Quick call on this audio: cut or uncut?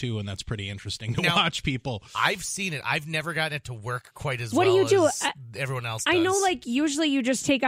uncut